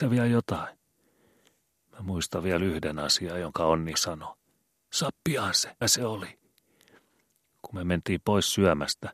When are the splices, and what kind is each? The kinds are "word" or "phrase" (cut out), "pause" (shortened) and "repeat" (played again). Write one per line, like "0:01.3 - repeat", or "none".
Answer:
0:03.9 - word
0:05.8 - word